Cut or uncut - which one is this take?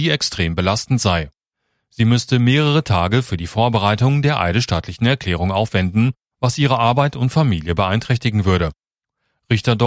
uncut